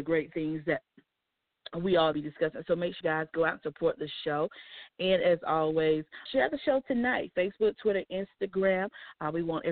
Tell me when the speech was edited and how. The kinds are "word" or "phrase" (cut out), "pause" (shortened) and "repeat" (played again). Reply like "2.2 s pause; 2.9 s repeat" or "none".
2.1 s phrase; 3.0 s word; 6.3 s word